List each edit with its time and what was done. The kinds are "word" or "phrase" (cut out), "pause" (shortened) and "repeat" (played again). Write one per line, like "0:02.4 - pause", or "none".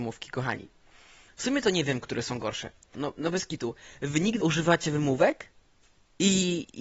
0:02.9 - phrase
0:04.4 - word